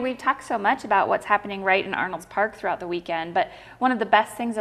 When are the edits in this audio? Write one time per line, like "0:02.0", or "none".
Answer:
none